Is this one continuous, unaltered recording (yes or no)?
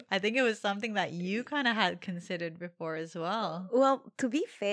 yes